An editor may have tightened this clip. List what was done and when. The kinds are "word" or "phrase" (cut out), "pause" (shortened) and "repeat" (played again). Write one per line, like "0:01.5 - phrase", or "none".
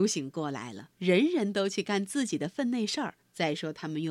0:00.9 - pause
0:03.2 - pause